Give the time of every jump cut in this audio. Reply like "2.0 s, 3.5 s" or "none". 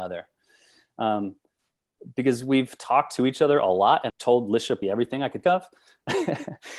4.1 s, 4.8 s, 5.4 s